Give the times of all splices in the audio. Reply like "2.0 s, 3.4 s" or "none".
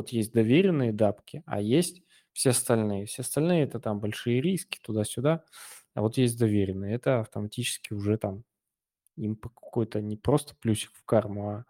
none